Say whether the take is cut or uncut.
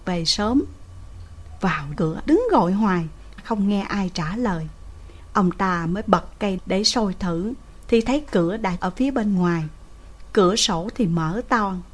cut